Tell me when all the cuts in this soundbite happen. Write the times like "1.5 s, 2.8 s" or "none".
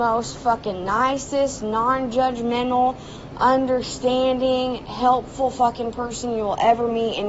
none